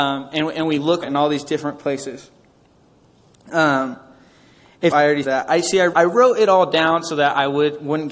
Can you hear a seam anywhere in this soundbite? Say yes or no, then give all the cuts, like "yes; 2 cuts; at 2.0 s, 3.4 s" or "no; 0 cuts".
yes; 4 cuts; at 1.0 s, 4.9 s, 5.2 s, 5.9 s